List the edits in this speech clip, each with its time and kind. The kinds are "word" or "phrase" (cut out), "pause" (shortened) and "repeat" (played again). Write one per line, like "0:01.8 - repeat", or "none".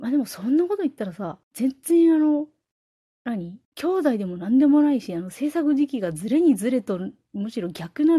0:01.4 - pause
0:03.6 - pause